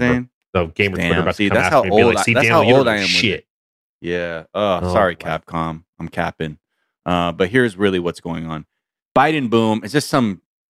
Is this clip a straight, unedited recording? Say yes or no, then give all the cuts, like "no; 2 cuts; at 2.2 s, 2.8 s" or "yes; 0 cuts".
yes; 0 cuts